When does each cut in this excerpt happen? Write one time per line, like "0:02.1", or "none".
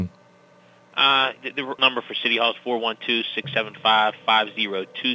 0:01.4
0:01.8